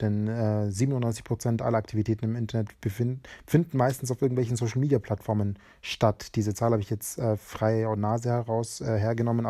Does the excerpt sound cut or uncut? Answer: uncut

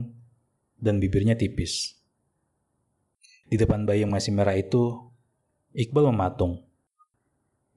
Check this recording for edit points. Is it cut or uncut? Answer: uncut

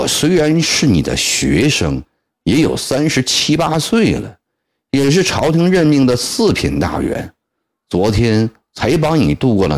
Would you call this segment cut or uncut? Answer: uncut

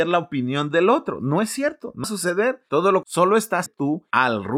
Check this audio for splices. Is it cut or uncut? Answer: cut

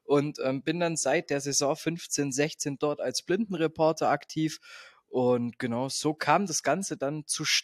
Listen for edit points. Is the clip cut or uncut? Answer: uncut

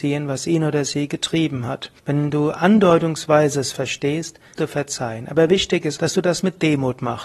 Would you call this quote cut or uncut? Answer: cut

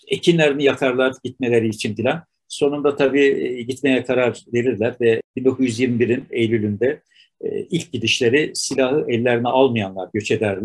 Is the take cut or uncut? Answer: uncut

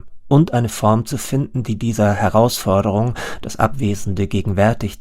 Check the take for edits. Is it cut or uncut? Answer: uncut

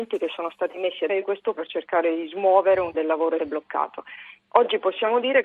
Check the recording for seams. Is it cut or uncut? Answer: cut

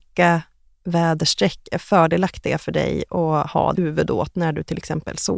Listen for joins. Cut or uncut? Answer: cut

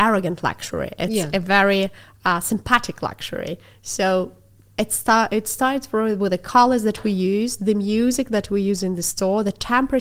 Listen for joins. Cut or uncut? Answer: uncut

